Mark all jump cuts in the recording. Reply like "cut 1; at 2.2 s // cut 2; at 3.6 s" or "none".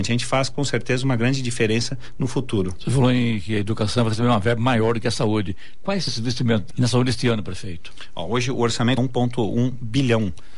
cut 1; at 6.1 s // cut 2; at 6.7 s // cut 3; at 9.0 s

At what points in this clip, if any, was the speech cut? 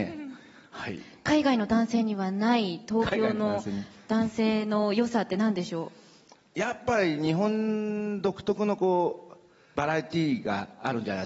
none

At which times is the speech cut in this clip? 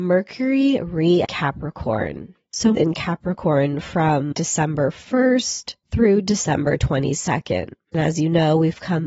cut 1; at 1.2 s // cut 2; at 2.7 s // cut 3; at 4.3 s // cut 4; at 5.8 s

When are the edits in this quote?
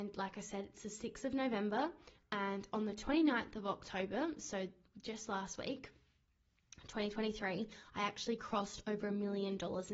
none

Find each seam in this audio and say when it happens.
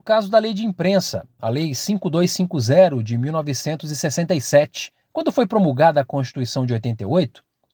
cut 1; at 5.0 s

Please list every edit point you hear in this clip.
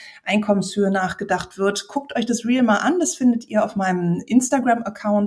none

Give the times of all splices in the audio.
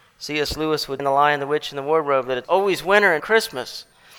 cut 1; at 1.0 s // cut 2; at 2.4 s // cut 3; at 3.2 s

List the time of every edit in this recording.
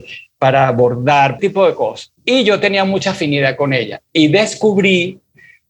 cut 1; at 1.4 s // cut 2; at 2.2 s

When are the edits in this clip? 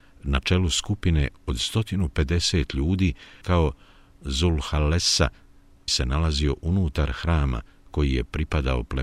cut 1; at 3.4 s // cut 2; at 5.9 s

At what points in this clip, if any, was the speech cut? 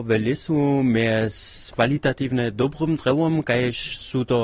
none

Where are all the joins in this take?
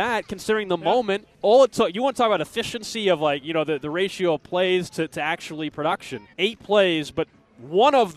cut 1; at 1.3 s // cut 2; at 6.3 s

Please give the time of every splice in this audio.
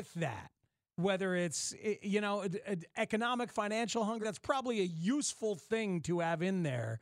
cut 1; at 3.5 s // cut 2; at 4.2 s

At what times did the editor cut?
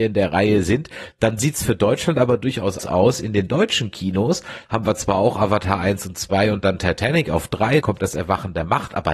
cut 1; at 2.8 s // cut 2; at 7.8 s

